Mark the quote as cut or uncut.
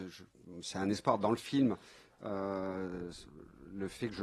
uncut